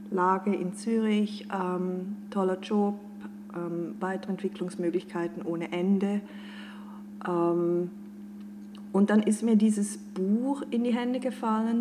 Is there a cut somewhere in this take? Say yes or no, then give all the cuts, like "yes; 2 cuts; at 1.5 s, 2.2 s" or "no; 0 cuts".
no; 0 cuts